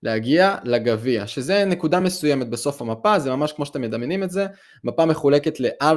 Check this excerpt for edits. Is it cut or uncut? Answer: uncut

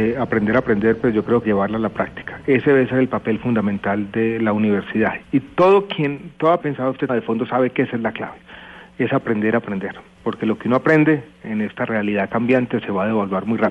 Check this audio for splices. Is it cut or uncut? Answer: cut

